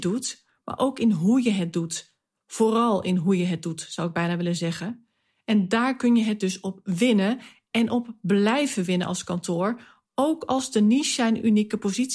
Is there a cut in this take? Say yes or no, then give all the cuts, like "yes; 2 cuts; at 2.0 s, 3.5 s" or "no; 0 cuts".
no; 0 cuts